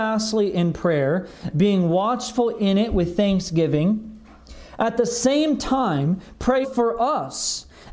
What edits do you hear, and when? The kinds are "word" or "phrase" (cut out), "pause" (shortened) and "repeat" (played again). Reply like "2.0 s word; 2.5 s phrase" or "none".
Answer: 6.6 s word